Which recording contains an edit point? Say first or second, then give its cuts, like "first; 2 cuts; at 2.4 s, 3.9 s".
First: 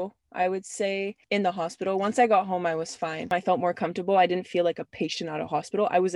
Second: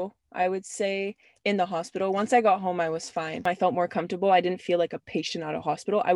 first; 1 cut; at 1.2 s